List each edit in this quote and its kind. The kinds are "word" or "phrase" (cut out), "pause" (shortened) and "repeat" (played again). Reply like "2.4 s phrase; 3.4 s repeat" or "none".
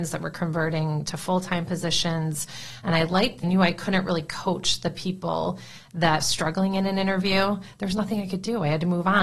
3.4 s phrase; 6.2 s phrase